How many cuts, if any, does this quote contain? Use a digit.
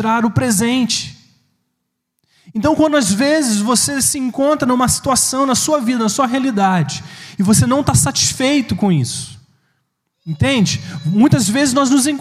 0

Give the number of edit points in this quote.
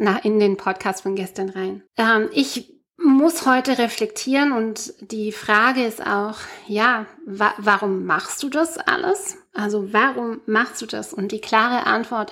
1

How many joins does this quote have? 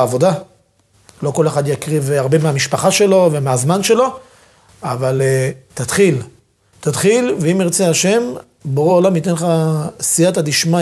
0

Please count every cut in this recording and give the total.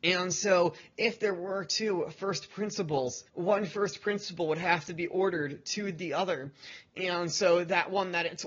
1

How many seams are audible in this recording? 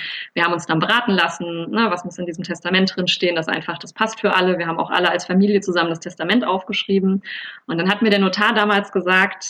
0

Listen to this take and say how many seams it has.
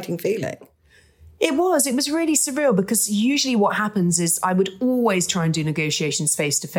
0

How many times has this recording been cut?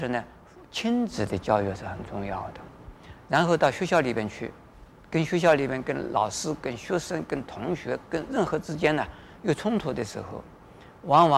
1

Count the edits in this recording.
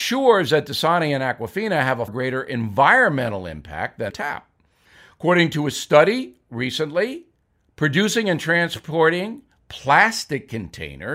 2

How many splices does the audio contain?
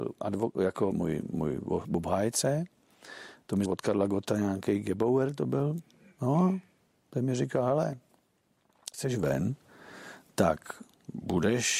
3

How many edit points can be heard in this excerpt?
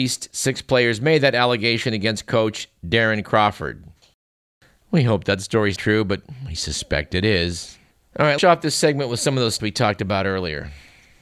4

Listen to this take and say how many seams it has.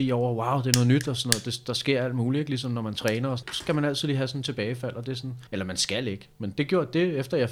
2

